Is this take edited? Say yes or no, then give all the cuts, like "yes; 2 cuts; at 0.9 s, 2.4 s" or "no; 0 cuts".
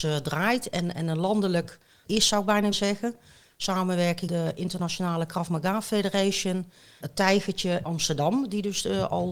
yes; 5 cuts; at 2.0 s, 2.7 s, 4.3 s, 7.0 s, 7.8 s